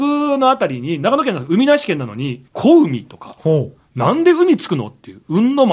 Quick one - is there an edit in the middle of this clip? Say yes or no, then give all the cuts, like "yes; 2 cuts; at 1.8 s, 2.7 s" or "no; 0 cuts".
yes; 1 cut; at 2.5 s